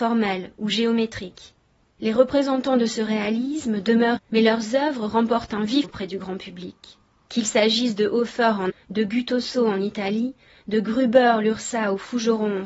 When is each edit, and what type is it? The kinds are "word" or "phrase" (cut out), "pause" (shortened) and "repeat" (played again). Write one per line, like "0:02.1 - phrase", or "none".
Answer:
0:04.2 - word
0:05.8 - word
0:08.7 - word

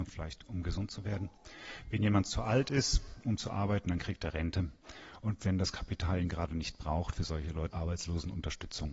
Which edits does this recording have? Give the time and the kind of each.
0:07.7 - phrase

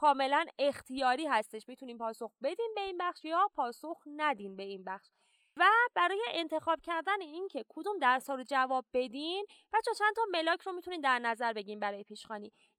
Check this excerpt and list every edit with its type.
none

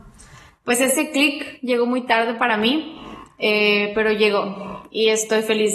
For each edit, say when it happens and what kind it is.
none

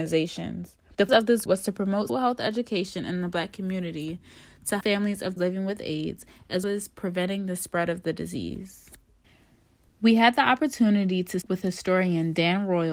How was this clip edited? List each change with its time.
0:01.1 - word
0:01.5 - word
0:02.1 - word
0:04.8 - word
0:05.4 - word
0:06.6 - word
0:11.4 - word

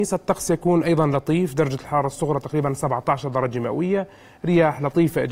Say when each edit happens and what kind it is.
none

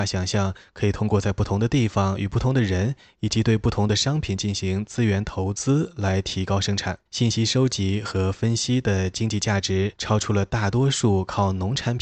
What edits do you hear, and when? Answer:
0:07.1 - pause
0:10.0 - pause

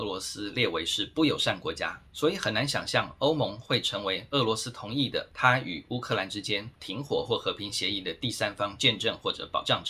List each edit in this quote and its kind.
0:02.1 - pause

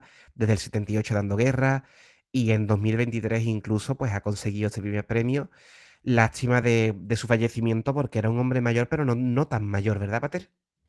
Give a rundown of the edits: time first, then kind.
none

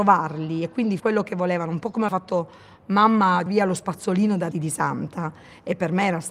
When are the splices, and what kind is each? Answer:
0:01.0 - word
0:02.1 - word
0:03.5 - word
0:04.5 - word

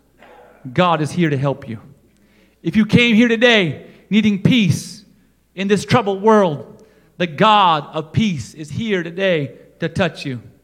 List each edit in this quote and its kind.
none

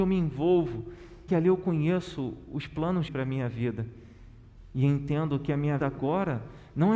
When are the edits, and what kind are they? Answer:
0:01.3 - phrase
0:03.1 - word
0:05.8 - word

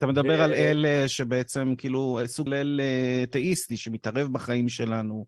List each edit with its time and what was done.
0:02.5 - word

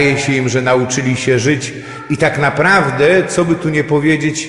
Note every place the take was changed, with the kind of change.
none

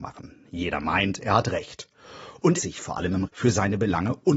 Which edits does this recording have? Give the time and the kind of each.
0:02.6 - word
0:03.3 - word

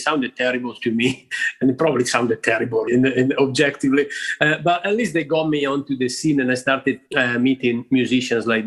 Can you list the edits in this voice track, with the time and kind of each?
0:02.9 - word
0:07.1 - pause

